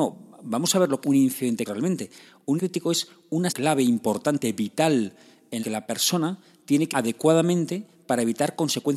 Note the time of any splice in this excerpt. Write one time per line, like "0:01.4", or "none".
0:01.0
0:01.6
0:02.6
0:03.5
0:05.6
0:06.9